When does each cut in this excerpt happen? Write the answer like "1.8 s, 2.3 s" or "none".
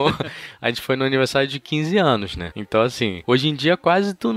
none

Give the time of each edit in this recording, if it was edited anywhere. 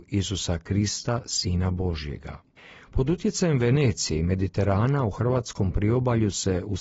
2.6 s

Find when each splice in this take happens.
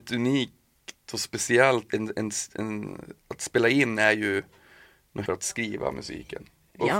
1.9 s, 5.3 s

